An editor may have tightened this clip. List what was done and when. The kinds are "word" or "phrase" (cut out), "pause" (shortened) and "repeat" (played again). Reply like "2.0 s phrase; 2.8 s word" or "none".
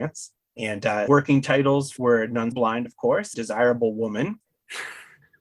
1.1 s word; 2.0 s word; 2.5 s word; 3.3 s word